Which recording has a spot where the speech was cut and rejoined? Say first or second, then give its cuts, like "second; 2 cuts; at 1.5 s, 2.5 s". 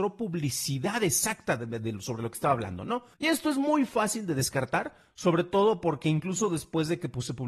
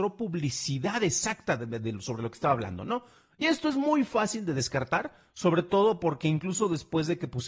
first; 1 cut; at 3.1 s